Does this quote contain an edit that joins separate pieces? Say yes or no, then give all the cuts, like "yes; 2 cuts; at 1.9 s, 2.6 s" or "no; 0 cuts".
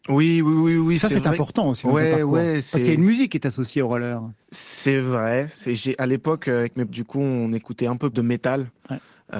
yes; 3 cuts; at 4.4 s, 6.9 s, 8.1 s